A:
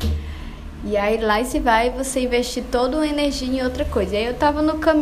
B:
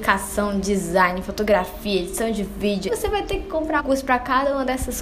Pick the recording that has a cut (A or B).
B